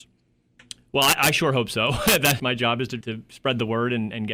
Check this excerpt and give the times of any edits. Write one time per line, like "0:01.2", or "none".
0:02.4
0:03.0